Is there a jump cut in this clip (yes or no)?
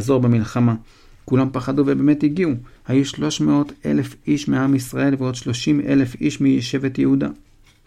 yes